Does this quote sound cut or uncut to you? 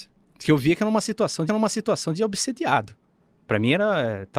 cut